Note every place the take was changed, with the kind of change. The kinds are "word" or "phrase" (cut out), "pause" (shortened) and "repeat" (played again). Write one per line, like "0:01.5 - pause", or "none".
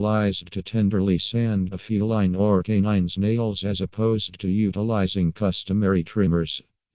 0:01.7 - word